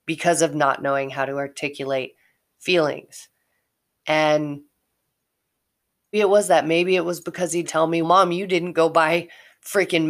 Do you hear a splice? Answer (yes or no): yes